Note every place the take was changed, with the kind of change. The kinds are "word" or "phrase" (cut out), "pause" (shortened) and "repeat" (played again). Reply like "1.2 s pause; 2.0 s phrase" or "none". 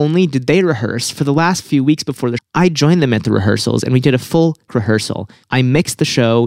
2.4 s word; 4.7 s word